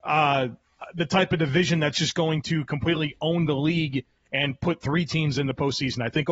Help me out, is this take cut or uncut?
uncut